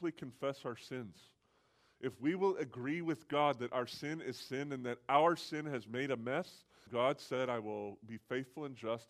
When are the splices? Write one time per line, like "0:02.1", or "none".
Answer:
0:06.9